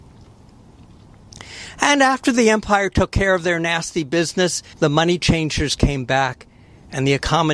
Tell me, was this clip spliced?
yes; 1 cut; at 4.7 s

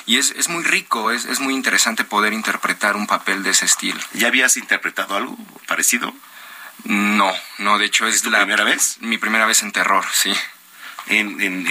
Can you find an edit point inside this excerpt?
no; 0 cuts

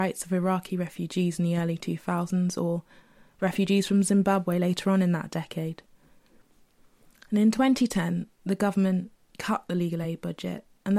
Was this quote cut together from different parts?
no; 0 cuts

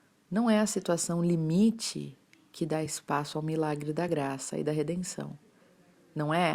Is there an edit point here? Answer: no; 0 cuts

